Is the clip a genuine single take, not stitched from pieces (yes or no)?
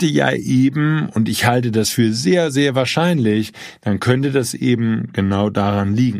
yes